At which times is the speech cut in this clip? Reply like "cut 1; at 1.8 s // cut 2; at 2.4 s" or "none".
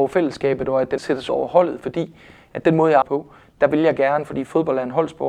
cut 1; at 1.0 s // cut 2; at 1.3 s // cut 3; at 3.0 s